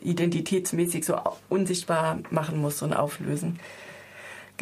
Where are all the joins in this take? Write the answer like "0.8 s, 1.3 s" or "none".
none